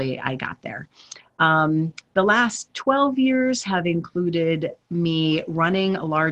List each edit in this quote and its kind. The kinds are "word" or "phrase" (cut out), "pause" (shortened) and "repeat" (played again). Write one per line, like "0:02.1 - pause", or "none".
none